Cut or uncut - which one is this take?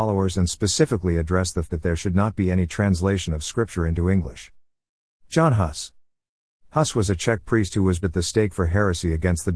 cut